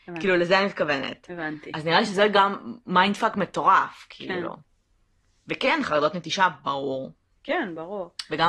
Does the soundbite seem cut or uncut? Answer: uncut